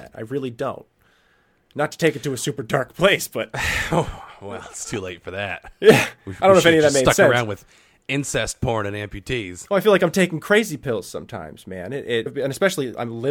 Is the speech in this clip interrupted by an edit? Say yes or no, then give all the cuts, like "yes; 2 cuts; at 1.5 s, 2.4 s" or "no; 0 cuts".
yes; 2 cuts; at 6.2 s, 12.3 s